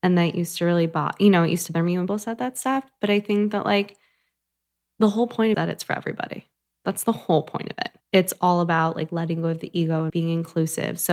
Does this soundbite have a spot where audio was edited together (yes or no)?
yes